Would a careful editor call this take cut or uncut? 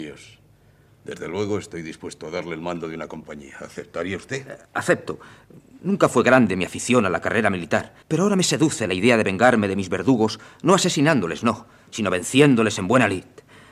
cut